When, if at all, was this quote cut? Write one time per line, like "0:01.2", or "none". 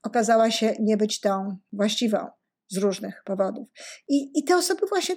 none